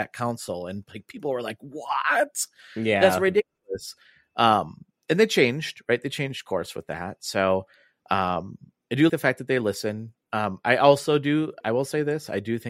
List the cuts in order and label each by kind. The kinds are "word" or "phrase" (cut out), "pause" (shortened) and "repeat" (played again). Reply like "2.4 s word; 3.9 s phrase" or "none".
9.1 s word; 11.6 s word